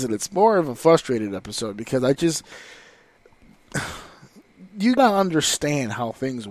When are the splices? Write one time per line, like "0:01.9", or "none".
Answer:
0:05.0